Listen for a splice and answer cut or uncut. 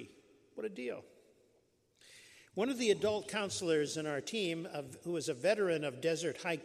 uncut